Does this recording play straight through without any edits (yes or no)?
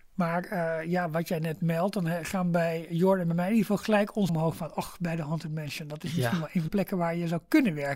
no